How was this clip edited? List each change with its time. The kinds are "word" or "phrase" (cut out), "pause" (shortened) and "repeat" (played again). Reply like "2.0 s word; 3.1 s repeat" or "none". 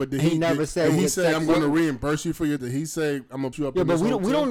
2.6 s word; 3.5 s word